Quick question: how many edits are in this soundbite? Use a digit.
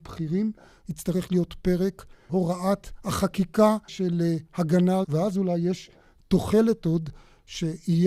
3